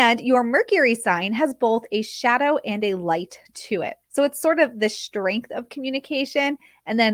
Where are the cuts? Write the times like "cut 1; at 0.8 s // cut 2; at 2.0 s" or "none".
cut 1; at 4.0 s

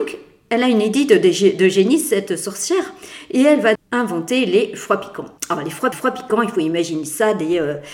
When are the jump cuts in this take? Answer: cut 1; at 3.8 s // cut 2; at 5.4 s // cut 3; at 5.9 s

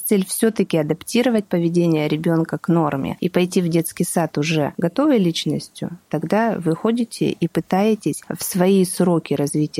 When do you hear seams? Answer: none

